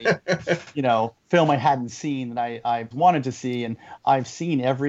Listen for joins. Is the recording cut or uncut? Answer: cut